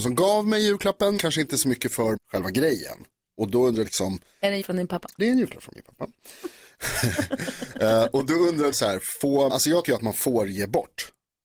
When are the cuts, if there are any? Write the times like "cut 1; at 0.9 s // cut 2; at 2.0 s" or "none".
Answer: cut 1; at 1.2 s // cut 2; at 2.2 s // cut 3; at 3.8 s // cut 4; at 4.6 s // cut 5; at 5.2 s // cut 6; at 8.7 s // cut 7; at 9.5 s // cut 8; at 9.8 s